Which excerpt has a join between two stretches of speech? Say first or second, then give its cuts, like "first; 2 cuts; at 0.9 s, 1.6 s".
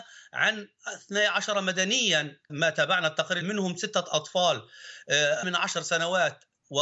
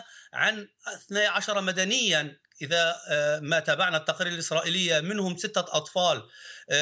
first; 3 cuts; at 2.5 s, 3.4 s, 5.4 s